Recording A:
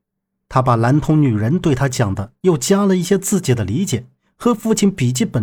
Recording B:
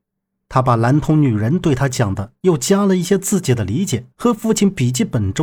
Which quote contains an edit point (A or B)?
B